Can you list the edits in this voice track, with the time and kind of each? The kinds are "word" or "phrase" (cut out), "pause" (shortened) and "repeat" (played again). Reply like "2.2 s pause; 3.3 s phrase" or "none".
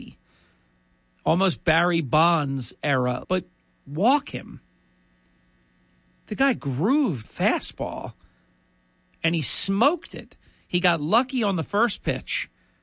3.2 s word; 7.2 s word